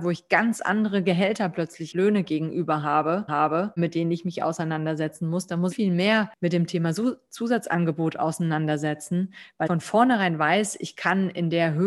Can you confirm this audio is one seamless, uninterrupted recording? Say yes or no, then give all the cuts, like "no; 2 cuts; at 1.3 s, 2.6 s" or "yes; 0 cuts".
no; 4 cuts; at 1.9 s, 3.3 s, 5.7 s, 9.7 s